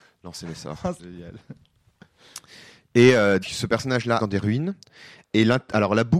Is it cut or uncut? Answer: cut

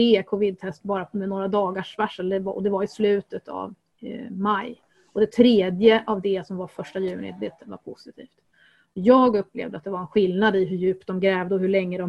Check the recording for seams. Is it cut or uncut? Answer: uncut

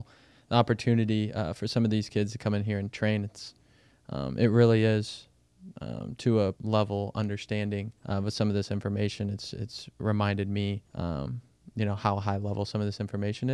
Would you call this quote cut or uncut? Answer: cut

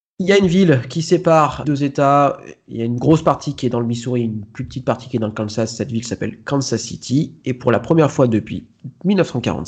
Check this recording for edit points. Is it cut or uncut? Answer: cut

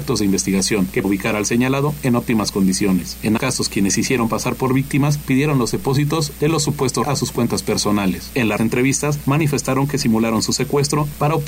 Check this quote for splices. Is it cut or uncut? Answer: cut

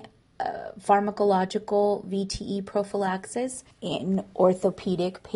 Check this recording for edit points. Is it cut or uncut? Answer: cut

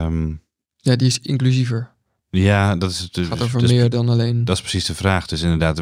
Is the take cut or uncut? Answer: uncut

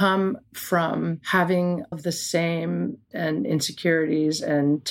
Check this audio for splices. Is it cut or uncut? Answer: cut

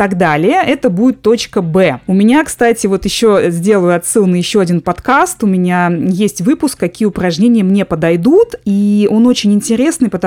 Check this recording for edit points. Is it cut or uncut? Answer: uncut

